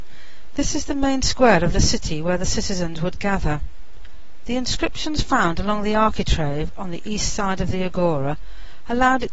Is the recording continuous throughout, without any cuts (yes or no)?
yes